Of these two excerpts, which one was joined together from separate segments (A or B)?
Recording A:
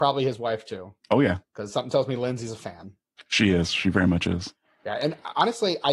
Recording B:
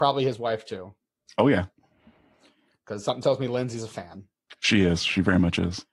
A